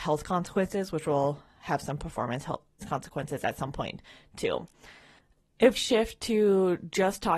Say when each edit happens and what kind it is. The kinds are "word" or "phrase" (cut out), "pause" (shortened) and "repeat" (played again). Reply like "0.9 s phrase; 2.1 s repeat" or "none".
2.8 s word; 5.7 s word